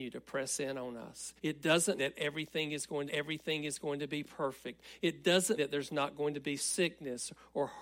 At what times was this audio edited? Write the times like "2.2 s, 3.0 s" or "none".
1.4 s, 2.0 s, 3.1 s, 5.6 s, 6.6 s